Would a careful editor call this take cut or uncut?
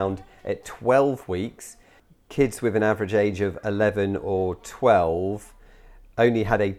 uncut